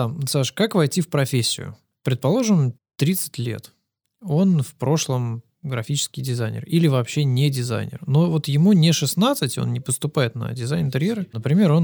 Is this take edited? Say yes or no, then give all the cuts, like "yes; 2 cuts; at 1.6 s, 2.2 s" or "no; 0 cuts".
yes; 1 cut; at 2.8 s